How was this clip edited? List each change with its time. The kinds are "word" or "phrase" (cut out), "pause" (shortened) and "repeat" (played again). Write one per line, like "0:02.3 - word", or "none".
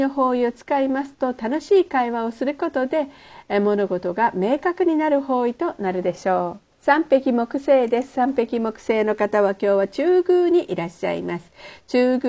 0:06.7 - pause